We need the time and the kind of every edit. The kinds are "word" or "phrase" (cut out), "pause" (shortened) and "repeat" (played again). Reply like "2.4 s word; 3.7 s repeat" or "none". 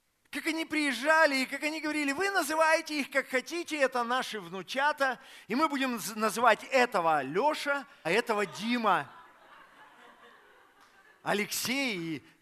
8.0 s word